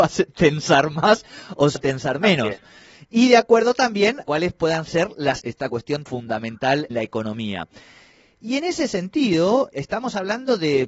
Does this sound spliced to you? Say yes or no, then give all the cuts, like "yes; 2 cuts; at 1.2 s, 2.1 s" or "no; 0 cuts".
yes; 6 cuts; at 1.8 s, 4.2 s, 5.4 s, 6.1 s, 6.9 s, 9.7 s